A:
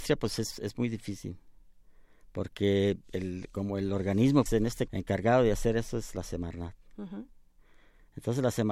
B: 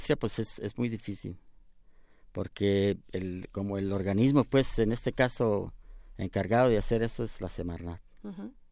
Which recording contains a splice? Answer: A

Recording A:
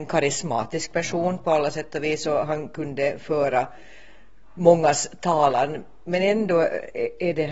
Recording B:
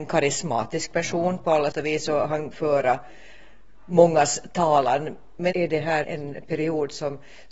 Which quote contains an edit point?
B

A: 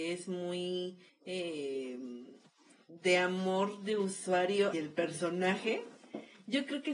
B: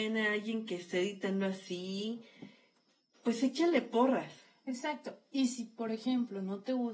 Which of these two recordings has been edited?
A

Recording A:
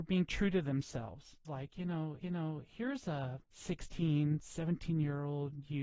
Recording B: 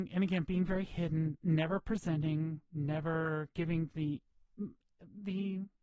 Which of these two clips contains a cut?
A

